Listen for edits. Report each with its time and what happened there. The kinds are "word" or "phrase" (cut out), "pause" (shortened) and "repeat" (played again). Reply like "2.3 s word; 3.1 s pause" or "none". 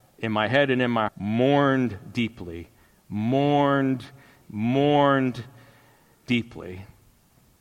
1.1 s word; 4.4 s word